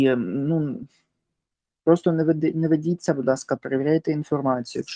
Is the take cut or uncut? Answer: uncut